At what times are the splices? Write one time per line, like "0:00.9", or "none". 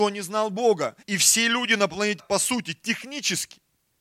0:01.0
0:02.2